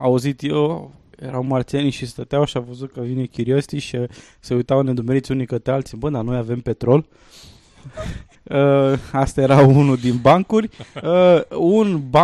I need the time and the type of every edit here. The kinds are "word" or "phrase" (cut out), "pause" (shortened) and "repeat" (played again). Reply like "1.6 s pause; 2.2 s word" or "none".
8.3 s pause